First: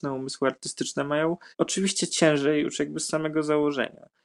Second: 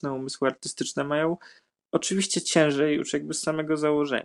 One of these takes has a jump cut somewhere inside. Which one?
first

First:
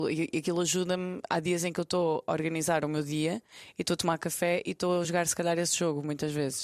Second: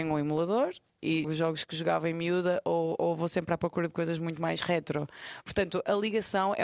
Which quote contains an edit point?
second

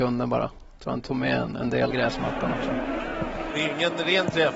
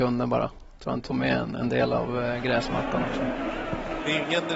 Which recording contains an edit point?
first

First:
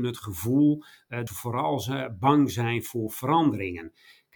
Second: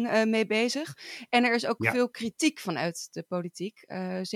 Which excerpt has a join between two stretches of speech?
first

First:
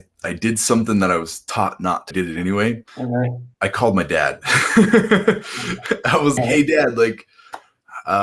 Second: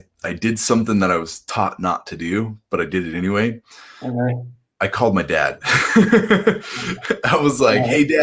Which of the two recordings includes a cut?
first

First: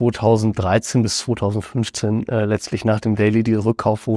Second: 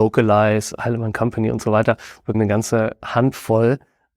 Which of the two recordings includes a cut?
second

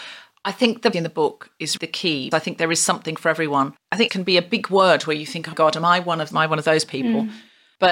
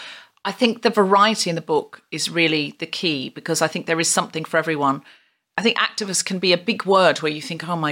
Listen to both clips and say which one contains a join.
first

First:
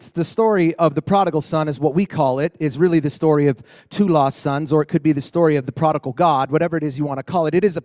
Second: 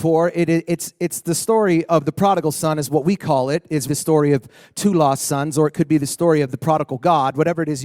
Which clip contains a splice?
second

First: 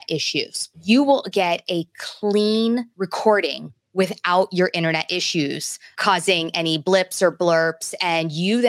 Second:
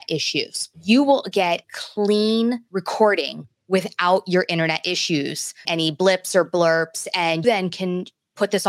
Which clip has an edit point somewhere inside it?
second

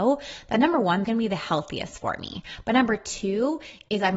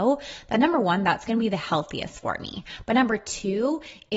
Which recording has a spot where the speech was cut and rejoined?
first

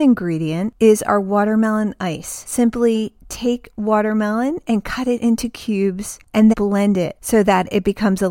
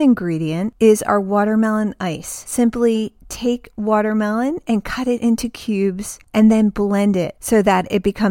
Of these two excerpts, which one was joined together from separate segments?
first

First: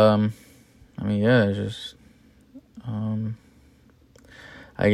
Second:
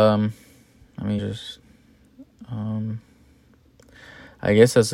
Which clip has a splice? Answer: second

